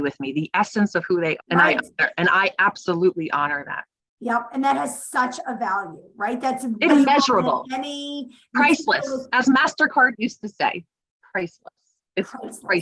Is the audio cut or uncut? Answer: cut